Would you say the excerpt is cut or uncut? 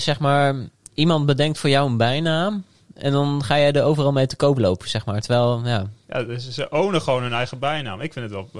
uncut